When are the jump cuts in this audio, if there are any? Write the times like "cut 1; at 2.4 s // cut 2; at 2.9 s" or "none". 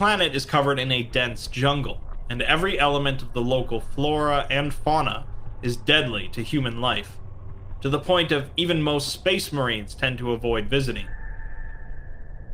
none